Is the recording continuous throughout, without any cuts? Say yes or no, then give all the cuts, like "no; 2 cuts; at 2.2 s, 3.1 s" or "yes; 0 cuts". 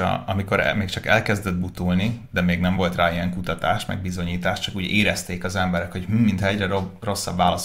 yes; 0 cuts